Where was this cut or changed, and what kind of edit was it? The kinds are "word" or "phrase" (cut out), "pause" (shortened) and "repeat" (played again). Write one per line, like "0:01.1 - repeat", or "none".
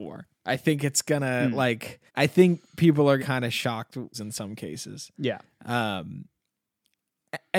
0:02.1 - pause
0:03.2 - phrase
0:04.1 - phrase

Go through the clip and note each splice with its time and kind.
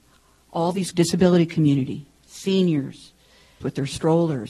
0:00.9 - word
0:03.6 - word

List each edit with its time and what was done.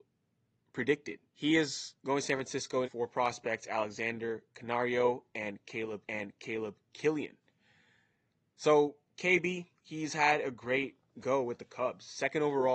0:01.3 - pause
0:02.0 - pause
0:02.8 - phrase
0:06.0 - repeat
0:09.8 - pause

